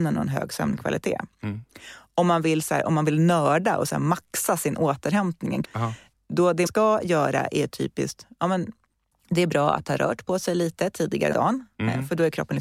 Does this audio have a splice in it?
yes; 4 cuts; at 5.6 s, 6.7 s, 9.1 s, 11.3 s

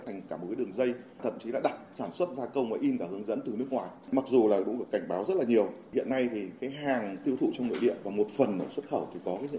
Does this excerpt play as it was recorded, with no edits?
yes; 0 cuts

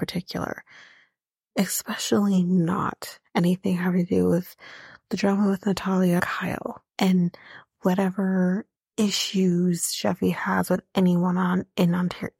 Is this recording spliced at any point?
yes; 3 cuts; at 6.2 s, 6.9 s, 8.8 s

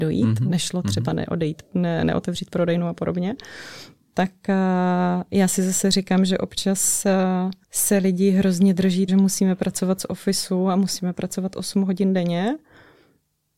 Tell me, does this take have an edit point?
yes; 2 cuts; at 7.6 s, 9.1 s

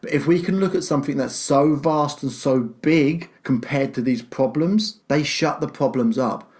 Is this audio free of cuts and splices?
no; 2 cuts; at 3.4 s, 5.0 s

